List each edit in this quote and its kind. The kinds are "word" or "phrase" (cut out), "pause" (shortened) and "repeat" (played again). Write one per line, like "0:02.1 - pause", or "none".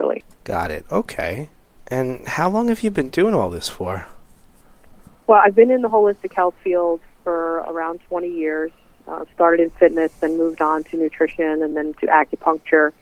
none